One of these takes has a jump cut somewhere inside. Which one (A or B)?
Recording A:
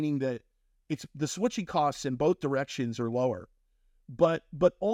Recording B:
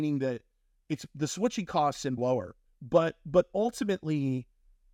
B